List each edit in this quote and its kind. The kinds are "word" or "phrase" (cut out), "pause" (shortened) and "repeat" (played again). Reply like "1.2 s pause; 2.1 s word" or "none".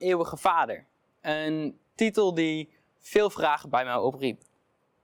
none

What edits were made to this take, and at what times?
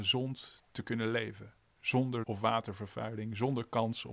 2.2 s word

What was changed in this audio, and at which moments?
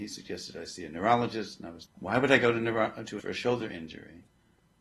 1.9 s word; 3.2 s word

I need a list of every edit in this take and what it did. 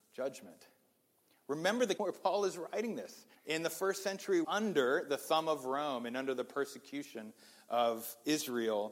2.0 s word; 3.3 s pause; 4.4 s phrase

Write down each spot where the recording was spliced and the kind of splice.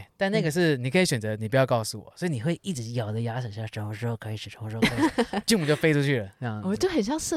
none

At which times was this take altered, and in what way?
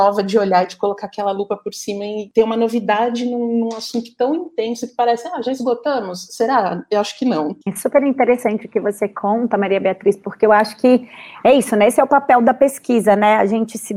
7.6 s pause

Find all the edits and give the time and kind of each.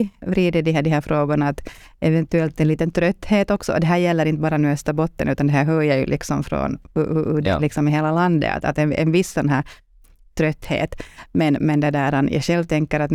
none

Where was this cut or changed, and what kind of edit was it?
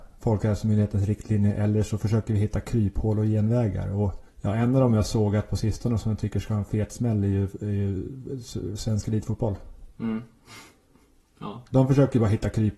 4.3 s pause

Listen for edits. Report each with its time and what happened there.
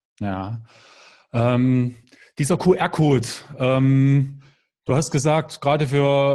none

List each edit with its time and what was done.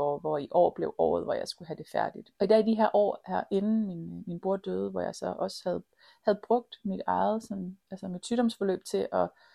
2.3 s pause; 7.8 s pause

